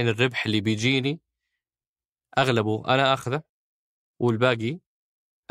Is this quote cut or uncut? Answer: uncut